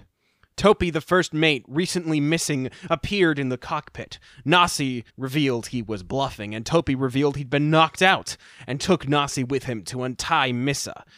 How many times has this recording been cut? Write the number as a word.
one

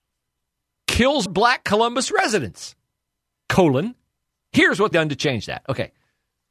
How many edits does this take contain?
two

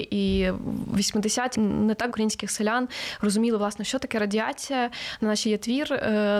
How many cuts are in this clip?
three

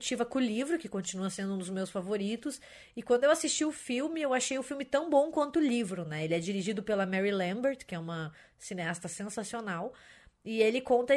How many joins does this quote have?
zero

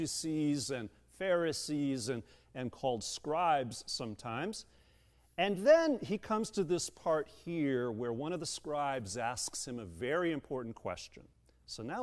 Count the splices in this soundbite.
zero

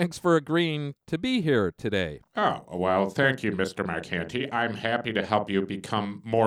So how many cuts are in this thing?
zero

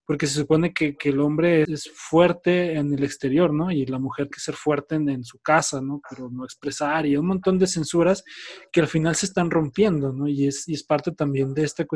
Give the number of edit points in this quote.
two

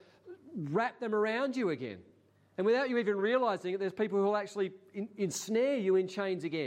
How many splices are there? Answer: zero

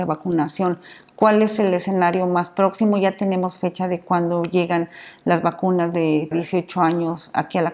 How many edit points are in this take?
one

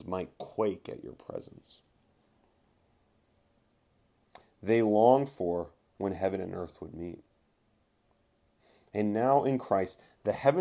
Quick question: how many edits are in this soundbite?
zero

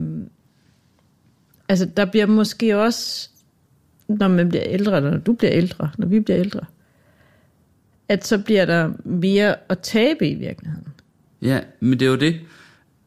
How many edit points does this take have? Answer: zero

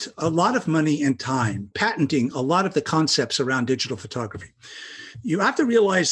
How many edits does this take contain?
zero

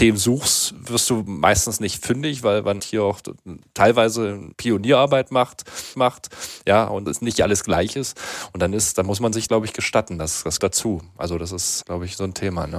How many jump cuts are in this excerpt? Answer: seven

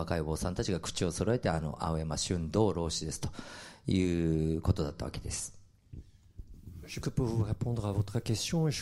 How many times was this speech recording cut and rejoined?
one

